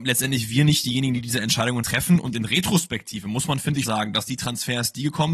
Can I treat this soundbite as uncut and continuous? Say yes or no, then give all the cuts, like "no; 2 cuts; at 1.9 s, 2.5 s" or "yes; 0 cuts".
no; 2 cuts; at 1.8 s, 3.8 s